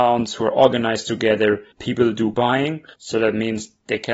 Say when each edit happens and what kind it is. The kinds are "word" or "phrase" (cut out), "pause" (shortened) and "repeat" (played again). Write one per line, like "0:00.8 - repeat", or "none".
0:01.7 - pause
0:02.3 - word
0:02.9 - pause